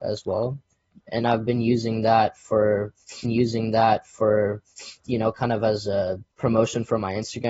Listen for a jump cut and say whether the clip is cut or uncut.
cut